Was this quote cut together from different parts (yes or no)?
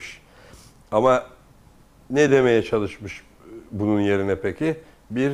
no